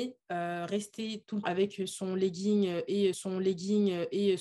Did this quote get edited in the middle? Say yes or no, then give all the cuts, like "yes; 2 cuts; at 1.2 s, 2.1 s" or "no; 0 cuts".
yes; 2 cuts; at 1.4 s, 3.1 s